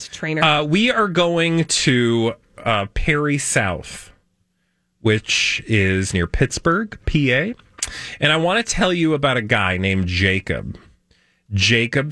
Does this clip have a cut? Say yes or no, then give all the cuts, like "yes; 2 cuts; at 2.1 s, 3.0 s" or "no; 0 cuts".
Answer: no; 0 cuts